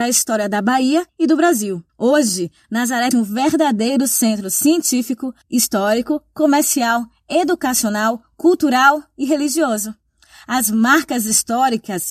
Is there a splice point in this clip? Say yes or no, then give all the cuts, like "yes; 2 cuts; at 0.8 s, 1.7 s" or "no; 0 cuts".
yes; 4 cuts; at 1.1 s, 1.9 s, 3.1 s, 5.4 s